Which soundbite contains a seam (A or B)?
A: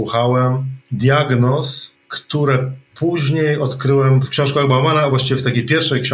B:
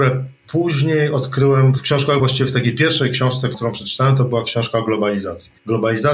B